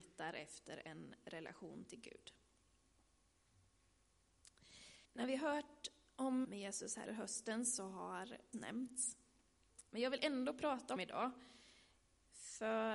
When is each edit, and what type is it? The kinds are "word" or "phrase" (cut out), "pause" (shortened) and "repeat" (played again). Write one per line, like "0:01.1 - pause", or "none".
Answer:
0:05.0 - pause
0:06.4 - word
0:07.1 - word
0:08.5 - word
0:11.0 - word